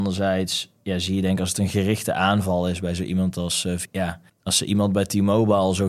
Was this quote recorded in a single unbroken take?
no; 2 cuts; at 3.8 s, 4.3 s

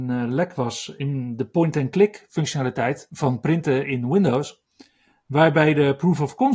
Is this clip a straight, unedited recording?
yes; 0 cuts

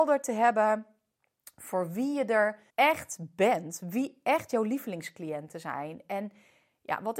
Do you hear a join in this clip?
yes; 1 cut; at 2.7 s

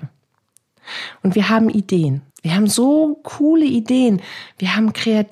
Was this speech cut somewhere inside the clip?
yes; 1 cut; at 2.3 s

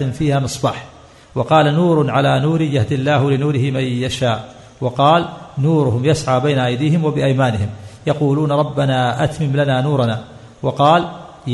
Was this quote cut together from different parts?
no; 0 cuts

